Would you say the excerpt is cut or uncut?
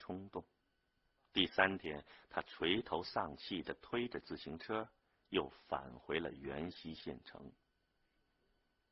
uncut